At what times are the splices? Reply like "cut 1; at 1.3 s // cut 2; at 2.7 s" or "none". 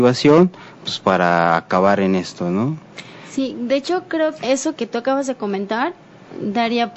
cut 1; at 4.4 s // cut 2; at 4.8 s